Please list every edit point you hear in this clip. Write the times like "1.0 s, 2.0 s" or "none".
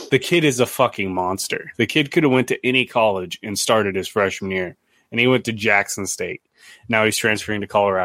none